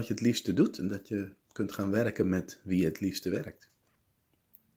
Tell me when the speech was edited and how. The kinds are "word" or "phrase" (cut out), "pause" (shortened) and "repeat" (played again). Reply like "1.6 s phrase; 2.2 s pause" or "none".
none